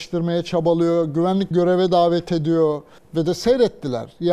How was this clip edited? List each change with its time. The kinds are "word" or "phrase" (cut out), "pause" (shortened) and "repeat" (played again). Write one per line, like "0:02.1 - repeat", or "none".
0:01.5 - word
0:03.0 - pause